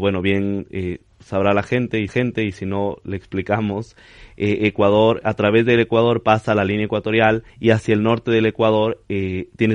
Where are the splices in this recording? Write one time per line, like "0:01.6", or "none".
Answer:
0:02.1
0:07.5